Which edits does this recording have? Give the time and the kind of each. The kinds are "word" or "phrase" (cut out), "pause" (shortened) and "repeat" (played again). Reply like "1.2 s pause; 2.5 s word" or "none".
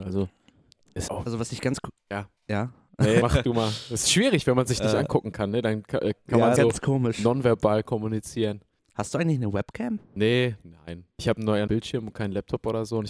1.1 s word; 2.4 s pause; 3.2 s word; 6.6 s phrase; 8.8 s pause; 11.1 s pause; 11.7 s word